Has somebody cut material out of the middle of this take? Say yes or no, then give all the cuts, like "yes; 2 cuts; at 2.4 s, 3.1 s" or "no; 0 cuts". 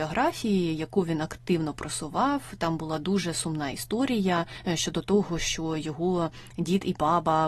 no; 0 cuts